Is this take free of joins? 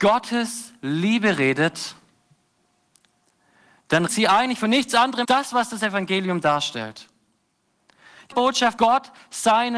no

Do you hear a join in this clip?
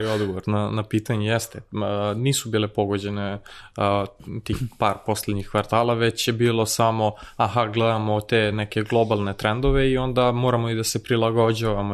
no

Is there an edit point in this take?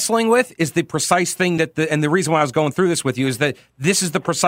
no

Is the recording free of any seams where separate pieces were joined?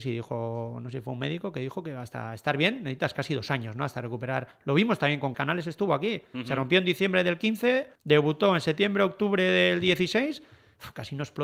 no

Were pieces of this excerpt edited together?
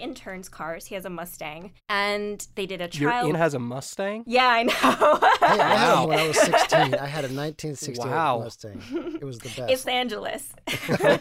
yes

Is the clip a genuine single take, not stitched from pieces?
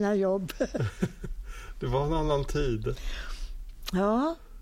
yes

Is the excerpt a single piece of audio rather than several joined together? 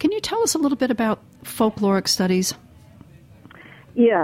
yes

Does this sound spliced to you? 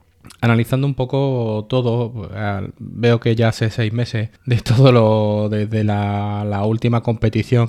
yes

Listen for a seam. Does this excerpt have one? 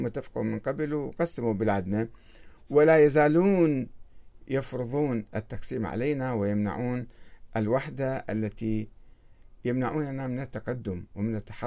no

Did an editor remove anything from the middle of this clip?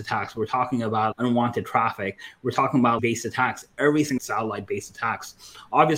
yes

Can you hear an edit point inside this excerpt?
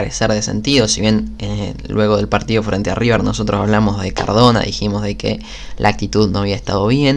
no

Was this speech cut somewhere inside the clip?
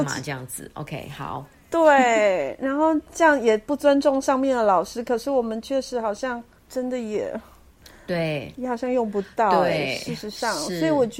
no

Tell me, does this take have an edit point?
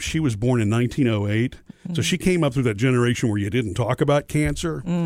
no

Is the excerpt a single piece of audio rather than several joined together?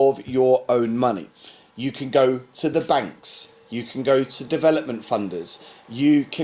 yes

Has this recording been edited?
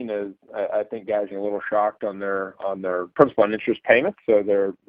yes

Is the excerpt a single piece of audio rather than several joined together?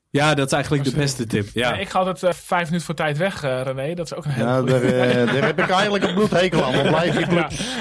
no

